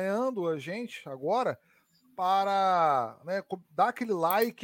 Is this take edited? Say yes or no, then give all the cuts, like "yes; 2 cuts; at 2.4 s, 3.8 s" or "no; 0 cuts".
no; 0 cuts